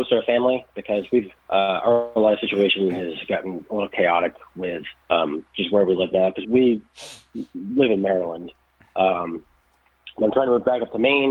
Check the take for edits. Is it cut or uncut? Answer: cut